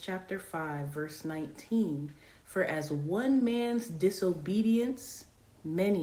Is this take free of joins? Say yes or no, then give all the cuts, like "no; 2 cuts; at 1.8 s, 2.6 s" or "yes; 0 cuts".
yes; 0 cuts